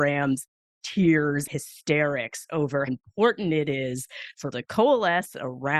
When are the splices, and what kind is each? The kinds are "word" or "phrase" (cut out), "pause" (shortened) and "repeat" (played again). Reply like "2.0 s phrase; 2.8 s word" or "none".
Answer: 1.5 s word; 2.9 s word; 4.5 s word